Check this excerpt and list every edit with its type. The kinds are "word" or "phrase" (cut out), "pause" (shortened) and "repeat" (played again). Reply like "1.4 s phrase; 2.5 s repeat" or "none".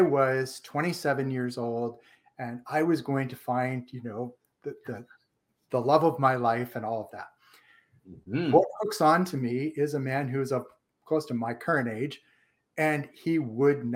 none